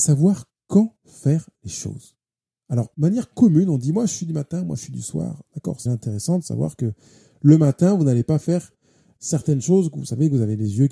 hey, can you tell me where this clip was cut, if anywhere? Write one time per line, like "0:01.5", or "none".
0:05.9